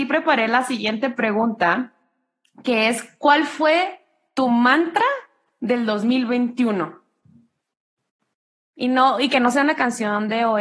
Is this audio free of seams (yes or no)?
yes